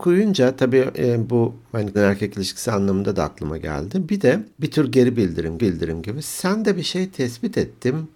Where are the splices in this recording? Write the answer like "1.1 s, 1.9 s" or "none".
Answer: 1.9 s, 4.6 s, 5.6 s